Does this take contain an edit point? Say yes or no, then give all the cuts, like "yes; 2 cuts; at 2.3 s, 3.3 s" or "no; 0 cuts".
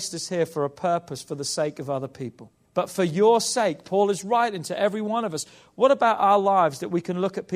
yes; 1 cut; at 2.6 s